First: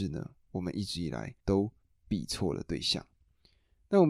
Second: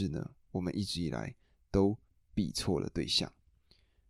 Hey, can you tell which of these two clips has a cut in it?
first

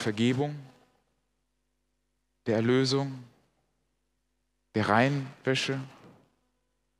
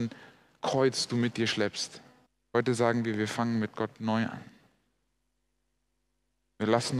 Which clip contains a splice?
second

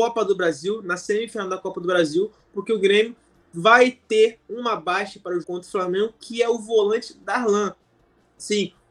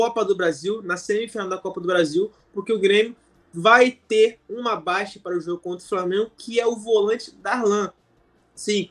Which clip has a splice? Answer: first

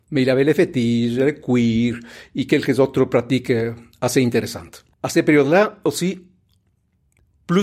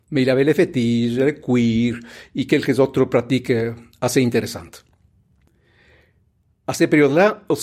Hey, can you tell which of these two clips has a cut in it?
first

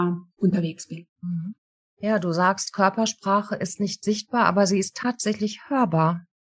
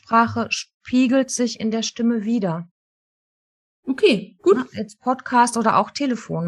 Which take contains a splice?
first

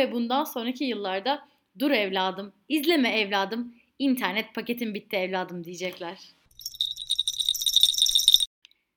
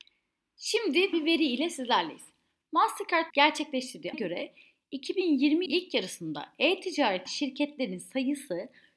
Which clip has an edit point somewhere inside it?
second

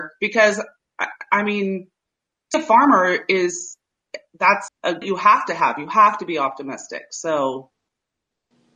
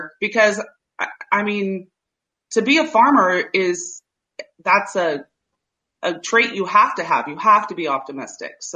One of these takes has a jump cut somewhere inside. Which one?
first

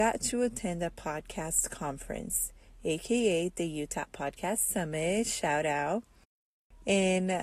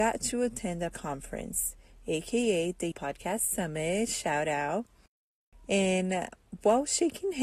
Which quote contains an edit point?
second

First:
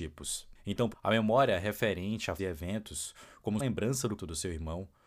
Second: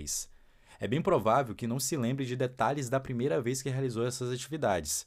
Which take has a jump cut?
first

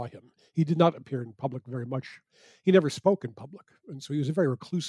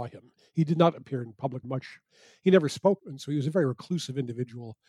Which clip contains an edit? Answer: second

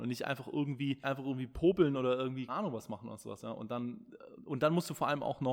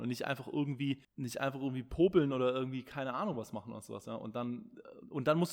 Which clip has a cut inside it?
first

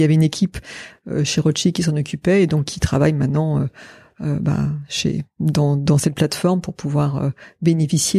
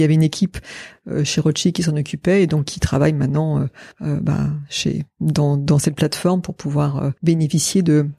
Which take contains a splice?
second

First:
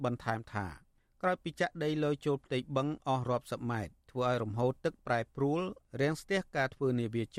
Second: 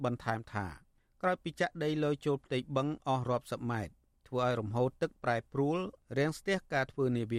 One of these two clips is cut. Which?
first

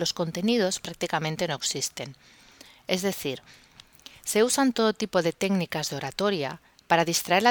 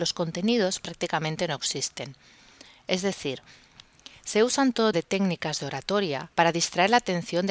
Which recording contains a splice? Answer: second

